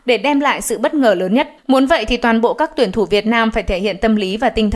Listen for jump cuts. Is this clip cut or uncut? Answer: cut